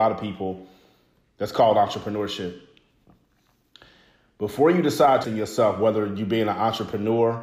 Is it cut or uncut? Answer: cut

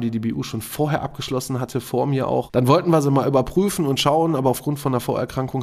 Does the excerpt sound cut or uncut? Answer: uncut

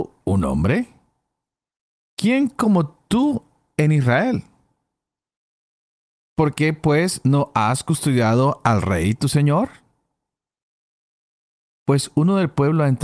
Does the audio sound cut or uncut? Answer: uncut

